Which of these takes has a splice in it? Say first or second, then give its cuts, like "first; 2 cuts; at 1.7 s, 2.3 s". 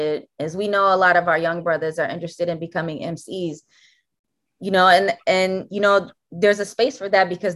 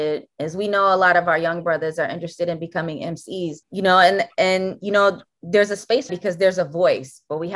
second; 2 cuts; at 3.6 s, 6.1 s